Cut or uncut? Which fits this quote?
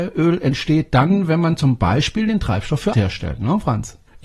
cut